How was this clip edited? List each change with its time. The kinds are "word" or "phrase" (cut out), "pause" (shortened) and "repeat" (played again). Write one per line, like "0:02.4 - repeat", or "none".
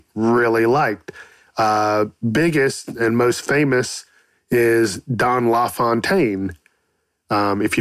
0:02.2 - word